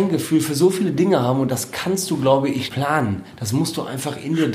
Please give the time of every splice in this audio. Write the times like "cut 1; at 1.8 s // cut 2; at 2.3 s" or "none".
cut 1; at 2.7 s